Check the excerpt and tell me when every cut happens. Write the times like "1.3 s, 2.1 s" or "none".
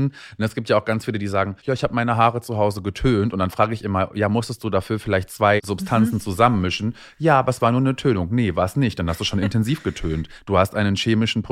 1.6 s, 5.6 s